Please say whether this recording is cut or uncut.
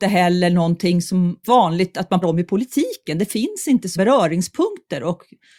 cut